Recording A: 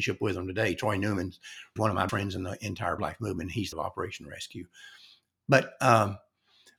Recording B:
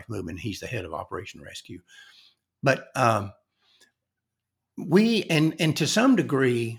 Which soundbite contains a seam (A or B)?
A